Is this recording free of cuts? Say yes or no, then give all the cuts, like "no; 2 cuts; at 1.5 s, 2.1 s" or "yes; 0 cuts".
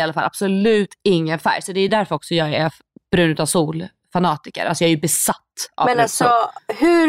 yes; 0 cuts